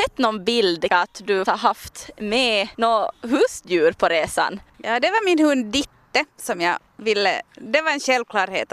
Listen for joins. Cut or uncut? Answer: cut